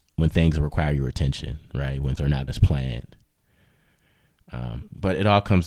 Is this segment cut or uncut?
cut